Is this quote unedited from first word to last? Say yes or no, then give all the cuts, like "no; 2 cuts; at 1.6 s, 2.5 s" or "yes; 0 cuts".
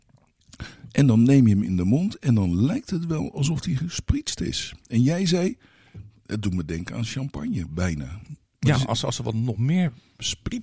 yes; 0 cuts